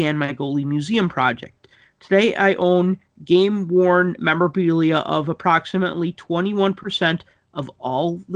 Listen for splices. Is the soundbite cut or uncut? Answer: uncut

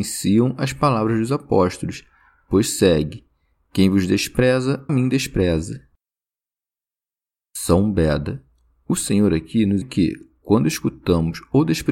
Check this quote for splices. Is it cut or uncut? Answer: cut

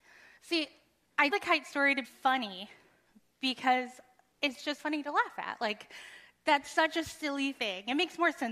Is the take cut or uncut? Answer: cut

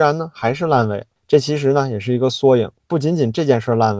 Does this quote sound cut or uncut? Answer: cut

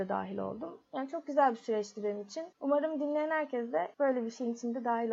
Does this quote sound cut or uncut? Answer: cut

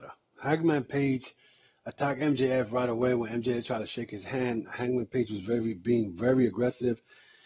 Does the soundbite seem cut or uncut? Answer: uncut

